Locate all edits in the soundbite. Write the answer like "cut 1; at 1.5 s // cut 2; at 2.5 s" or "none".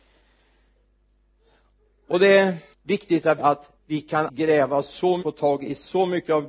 cut 1; at 2.7 s // cut 2; at 3.4 s // cut 3; at 3.8 s // cut 4; at 4.3 s // cut 5; at 5.2 s